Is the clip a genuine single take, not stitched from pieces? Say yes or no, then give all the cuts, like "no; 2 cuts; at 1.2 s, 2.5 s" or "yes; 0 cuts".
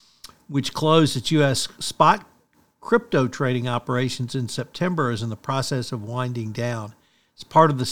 yes; 0 cuts